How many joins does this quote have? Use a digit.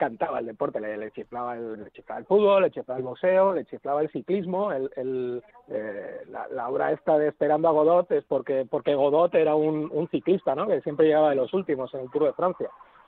3